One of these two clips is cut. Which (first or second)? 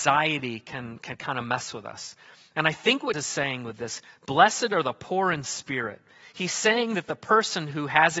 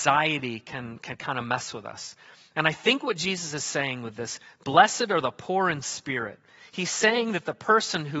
first